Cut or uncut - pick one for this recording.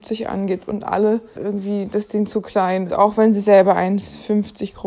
cut